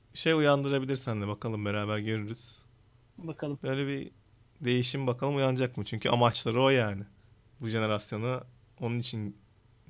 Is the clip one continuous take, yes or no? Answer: yes